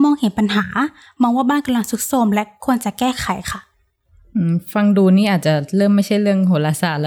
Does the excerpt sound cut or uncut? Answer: uncut